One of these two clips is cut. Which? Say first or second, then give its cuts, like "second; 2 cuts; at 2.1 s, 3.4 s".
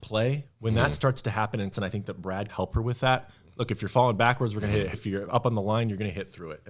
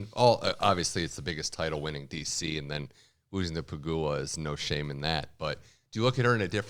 first; 3 cuts; at 1.7 s, 2.5 s, 4.9 s